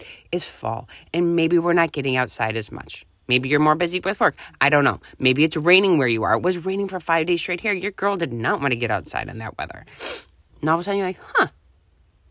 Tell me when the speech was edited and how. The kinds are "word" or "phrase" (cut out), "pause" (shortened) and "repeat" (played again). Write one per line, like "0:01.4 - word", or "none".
0:10.5 - pause

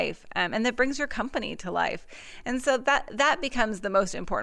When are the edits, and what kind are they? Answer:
none

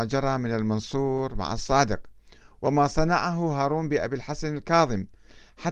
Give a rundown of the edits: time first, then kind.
none

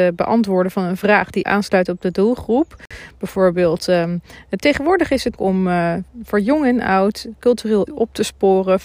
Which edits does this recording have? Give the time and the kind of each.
0:01.4 - word
0:05.4 - word
0:07.9 - word

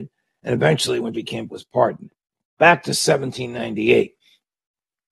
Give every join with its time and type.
0:01.1 - word
0:01.5 - word

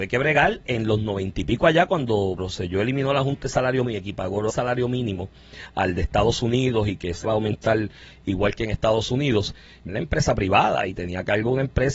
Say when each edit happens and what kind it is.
0:02.4 - word
0:03.8 - word
0:04.5 - word
0:07.2 - word
0:09.9 - word

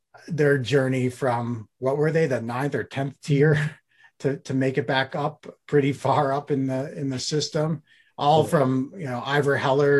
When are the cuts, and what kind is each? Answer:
0:05.6 - word

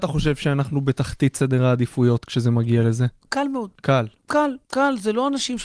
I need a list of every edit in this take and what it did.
0:03.7 - pause
0:04.6 - pause

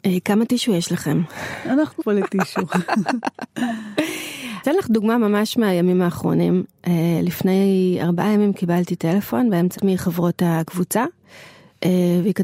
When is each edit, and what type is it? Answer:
0:02.0 - word
0:04.6 - word
0:09.8 - phrase

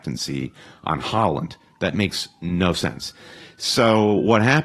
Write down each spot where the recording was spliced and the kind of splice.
none

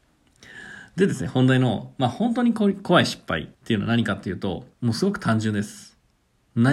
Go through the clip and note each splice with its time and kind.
0:03.5 - pause
0:04.7 - pause

